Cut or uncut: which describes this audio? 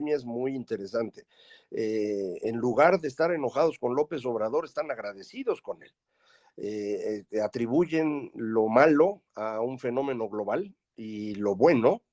uncut